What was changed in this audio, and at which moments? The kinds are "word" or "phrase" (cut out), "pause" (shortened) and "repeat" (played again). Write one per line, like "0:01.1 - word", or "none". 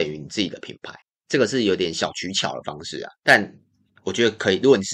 0:01.0 - pause
0:03.2 - pause